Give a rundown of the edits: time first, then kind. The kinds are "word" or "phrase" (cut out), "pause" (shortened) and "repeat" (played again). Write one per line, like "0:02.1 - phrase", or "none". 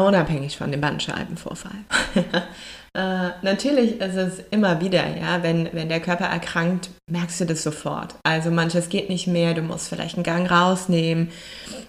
none